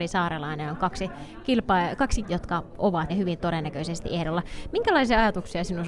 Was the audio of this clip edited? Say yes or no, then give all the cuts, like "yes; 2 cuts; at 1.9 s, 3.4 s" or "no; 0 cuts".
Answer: yes; 2 cuts; at 2.2 s, 3.1 s